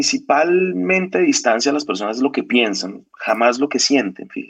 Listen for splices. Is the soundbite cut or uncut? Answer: uncut